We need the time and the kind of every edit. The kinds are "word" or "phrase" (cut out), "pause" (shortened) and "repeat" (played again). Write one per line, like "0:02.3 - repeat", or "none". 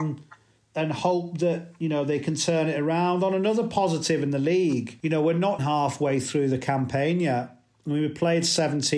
0:05.6 - word